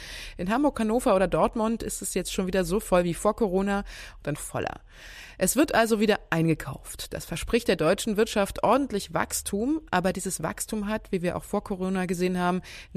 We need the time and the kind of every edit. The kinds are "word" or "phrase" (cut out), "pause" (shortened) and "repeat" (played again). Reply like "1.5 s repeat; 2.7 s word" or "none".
4.4 s phrase

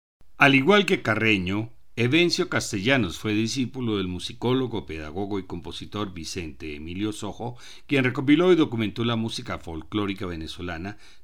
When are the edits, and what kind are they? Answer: none

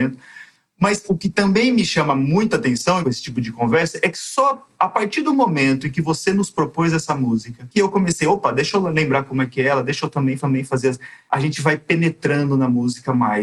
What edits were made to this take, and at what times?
1.1 s word; 3.0 s phrase; 10.4 s repeat

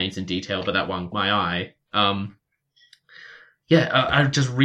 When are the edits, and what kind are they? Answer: 1.1 s word

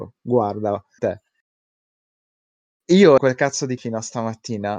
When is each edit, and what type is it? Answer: 1.0 s phrase; 3.2 s phrase; 3.8 s word

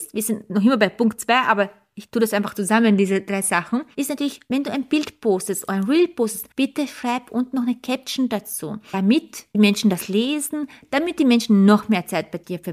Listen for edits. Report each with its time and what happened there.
6.5 s pause

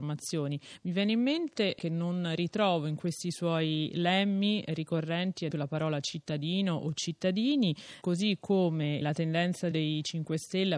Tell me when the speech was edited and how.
5.5 s word; 8.0 s word; 9.0 s word; 9.7 s word

